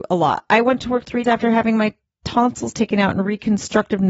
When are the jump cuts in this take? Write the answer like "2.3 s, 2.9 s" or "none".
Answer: 1.2 s